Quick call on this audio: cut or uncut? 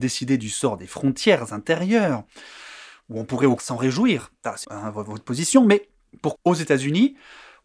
cut